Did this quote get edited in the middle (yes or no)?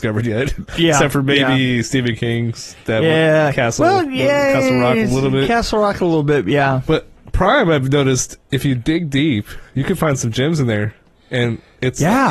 no